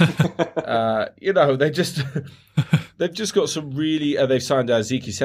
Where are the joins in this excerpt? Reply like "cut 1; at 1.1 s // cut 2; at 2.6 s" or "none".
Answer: none